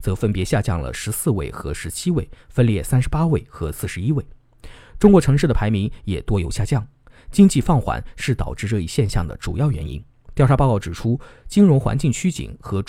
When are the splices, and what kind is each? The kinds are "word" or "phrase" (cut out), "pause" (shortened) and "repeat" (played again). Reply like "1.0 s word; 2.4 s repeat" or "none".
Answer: none

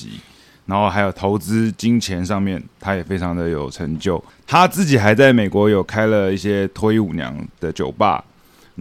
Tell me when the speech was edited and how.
4.3 s pause; 7.5 s pause

